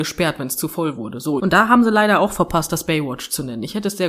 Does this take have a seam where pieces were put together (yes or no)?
yes